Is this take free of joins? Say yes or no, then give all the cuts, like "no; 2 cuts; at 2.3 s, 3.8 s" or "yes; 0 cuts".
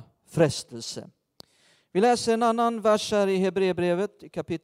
yes; 0 cuts